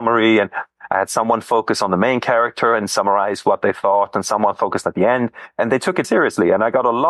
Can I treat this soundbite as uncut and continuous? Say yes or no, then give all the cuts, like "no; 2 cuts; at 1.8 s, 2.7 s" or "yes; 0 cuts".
no; 1 cut; at 6.0 s